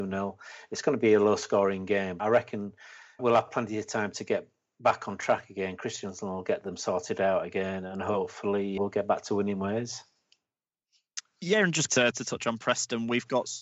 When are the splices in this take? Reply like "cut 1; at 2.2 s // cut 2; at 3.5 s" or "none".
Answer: cut 1; at 2.2 s // cut 2; at 3.2 s // cut 3; at 8.8 s // cut 4; at 11.9 s